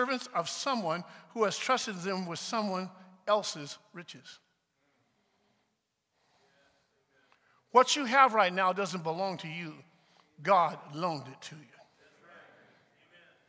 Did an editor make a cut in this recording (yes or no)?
no